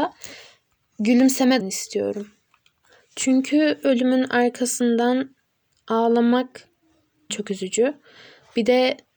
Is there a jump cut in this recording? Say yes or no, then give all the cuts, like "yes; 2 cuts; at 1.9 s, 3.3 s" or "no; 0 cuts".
yes; 3 cuts; at 1.6 s, 3.8 s, 7.3 s